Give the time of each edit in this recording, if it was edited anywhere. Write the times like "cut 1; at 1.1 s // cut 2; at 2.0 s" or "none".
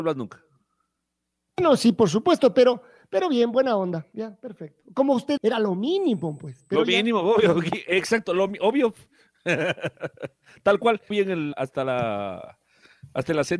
cut 1; at 5.4 s // cut 2; at 11.1 s // cut 3; at 11.5 s